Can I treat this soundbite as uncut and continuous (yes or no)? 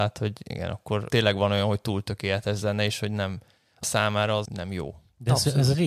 no